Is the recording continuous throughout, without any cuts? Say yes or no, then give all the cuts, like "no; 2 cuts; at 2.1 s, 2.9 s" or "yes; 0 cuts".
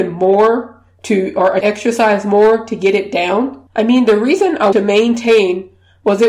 no; 3 cuts; at 1.6 s, 3.7 s, 4.7 s